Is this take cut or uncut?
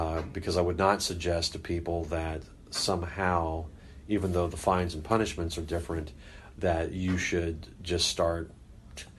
uncut